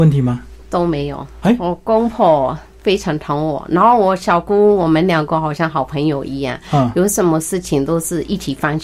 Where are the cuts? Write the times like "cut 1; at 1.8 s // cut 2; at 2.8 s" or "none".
none